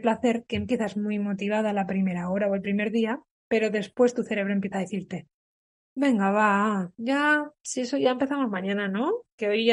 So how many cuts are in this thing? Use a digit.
0